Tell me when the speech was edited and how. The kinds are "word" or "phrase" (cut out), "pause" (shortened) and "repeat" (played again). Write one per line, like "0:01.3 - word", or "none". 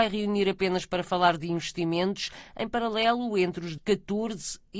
0:03.8 - word